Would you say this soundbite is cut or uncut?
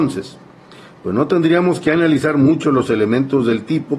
uncut